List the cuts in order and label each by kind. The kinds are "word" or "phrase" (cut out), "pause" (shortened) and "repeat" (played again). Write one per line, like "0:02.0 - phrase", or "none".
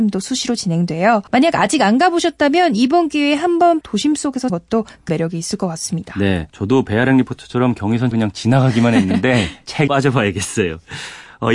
0:01.3 - pause
0:03.8 - word
0:04.5 - phrase
0:05.1 - word
0:06.5 - pause
0:08.1 - word
0:09.9 - word